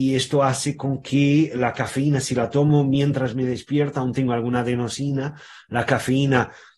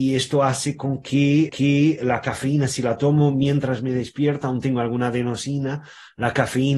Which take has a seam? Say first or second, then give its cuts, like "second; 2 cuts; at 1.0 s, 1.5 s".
second; 1 cut; at 1.5 s